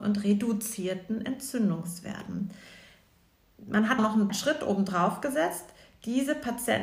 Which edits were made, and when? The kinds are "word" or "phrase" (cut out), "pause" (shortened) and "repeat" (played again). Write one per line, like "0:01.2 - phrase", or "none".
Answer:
0:04.0 - word
0:04.3 - word